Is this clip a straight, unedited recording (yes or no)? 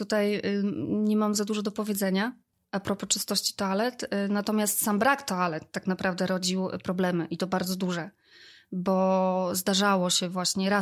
yes